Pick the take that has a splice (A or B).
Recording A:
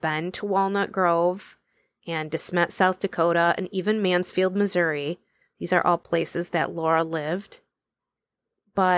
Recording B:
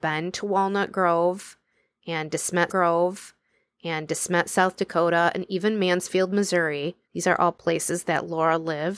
B